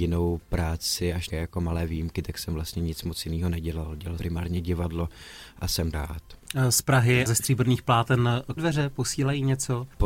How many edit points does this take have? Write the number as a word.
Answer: five